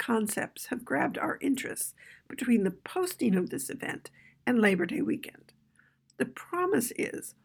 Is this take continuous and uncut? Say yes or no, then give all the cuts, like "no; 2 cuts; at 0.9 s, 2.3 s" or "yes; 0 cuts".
yes; 0 cuts